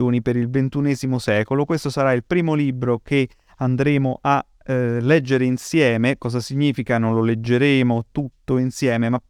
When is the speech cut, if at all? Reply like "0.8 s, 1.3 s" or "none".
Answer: none